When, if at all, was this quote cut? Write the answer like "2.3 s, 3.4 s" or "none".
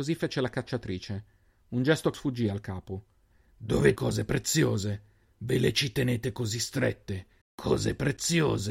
2.1 s, 4.0 s, 7.4 s